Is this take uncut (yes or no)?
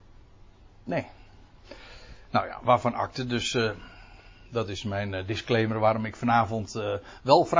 yes